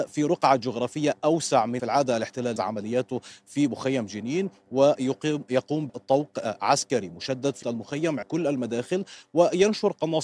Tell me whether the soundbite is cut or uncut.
cut